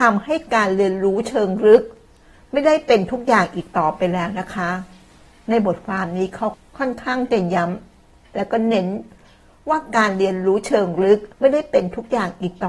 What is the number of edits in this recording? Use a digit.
1